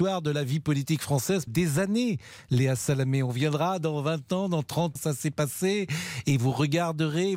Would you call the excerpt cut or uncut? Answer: cut